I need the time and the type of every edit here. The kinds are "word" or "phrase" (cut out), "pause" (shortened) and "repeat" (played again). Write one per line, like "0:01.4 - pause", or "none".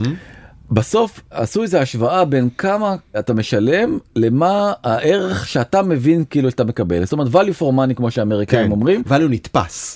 none